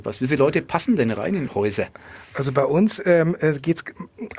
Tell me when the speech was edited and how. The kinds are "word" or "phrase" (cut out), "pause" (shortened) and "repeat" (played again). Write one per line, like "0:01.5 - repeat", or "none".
0:01.5 - word